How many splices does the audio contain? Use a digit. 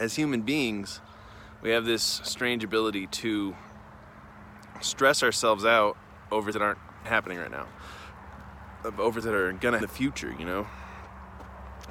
4